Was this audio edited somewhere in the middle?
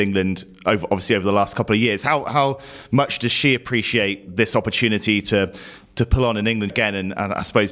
yes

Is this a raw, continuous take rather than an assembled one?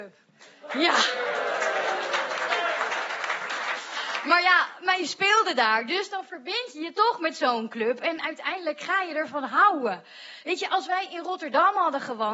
no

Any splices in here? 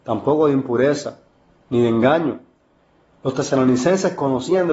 no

